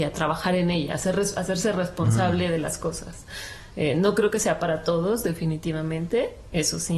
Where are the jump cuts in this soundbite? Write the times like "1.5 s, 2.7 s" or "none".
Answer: none